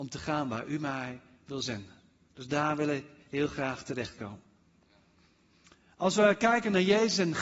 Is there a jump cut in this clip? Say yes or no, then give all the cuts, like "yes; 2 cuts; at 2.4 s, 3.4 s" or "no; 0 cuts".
no; 0 cuts